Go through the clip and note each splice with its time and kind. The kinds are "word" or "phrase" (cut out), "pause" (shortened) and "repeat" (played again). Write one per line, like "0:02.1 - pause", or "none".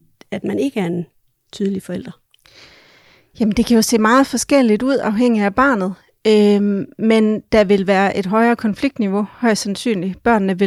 none